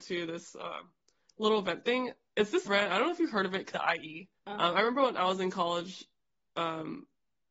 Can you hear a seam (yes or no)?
yes